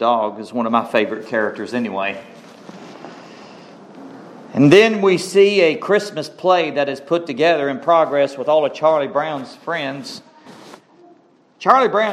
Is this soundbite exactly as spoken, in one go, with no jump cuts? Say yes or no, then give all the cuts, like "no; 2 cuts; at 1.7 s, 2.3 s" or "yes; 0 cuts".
yes; 0 cuts